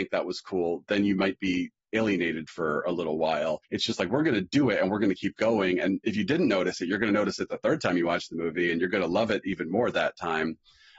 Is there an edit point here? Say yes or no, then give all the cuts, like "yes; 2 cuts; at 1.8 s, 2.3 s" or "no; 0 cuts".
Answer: yes; 1 cut; at 3.6 s